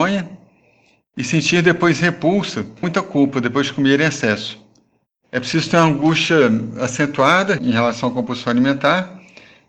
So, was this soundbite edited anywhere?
yes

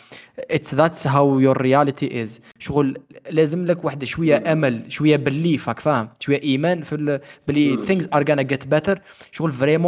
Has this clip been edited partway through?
no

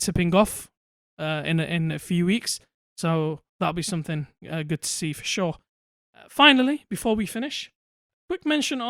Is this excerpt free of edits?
yes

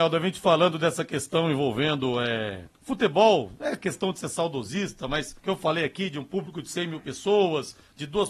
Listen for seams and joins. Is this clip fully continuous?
no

